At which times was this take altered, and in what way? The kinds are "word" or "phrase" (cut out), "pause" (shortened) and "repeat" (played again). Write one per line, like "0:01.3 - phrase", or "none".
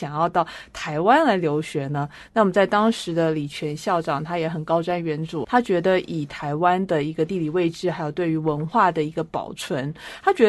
0:05.4 - word

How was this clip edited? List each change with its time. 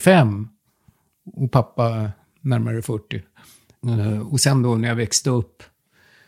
none

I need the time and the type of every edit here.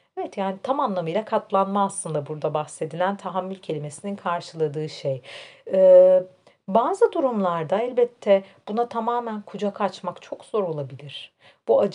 none

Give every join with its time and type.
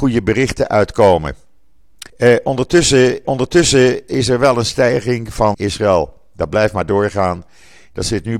0:02.1 - pause
0:03.2 - repeat
0:05.5 - phrase

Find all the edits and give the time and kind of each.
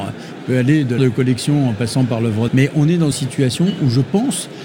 0:01.0 - word
0:02.5 - word
0:03.1 - word

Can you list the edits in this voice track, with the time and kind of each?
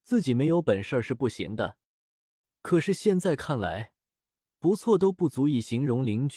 none

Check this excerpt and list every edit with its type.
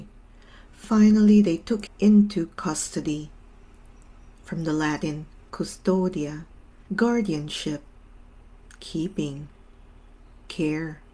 0:01.9 - word
0:06.9 - word

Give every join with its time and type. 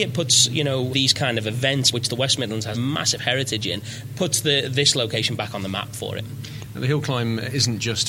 0:00.9 - word
0:01.9 - word
0:02.7 - word

